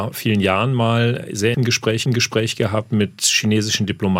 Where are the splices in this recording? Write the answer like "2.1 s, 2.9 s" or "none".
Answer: 1.5 s, 2.1 s